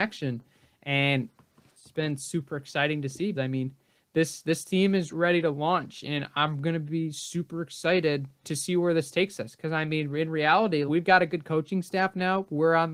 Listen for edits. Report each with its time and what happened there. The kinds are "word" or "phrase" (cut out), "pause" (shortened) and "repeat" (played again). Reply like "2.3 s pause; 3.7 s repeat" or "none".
3.3 s word; 5.1 s word; 8.4 s word; 10.9 s word